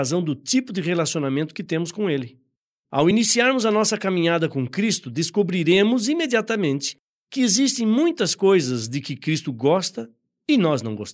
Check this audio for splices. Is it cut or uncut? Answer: uncut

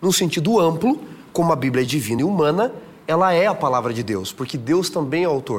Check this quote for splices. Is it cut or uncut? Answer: uncut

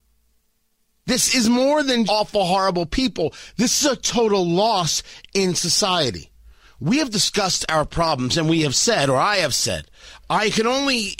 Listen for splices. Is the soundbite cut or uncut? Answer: cut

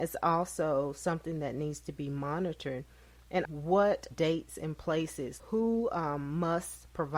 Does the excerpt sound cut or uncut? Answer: cut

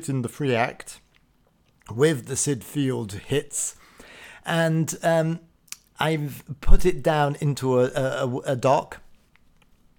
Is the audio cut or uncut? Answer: uncut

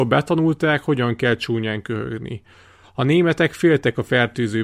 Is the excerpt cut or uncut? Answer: uncut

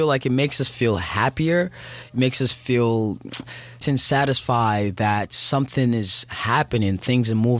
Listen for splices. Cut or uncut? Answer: cut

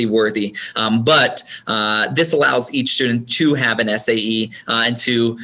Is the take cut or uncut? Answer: uncut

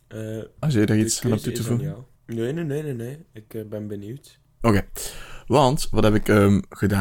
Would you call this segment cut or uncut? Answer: cut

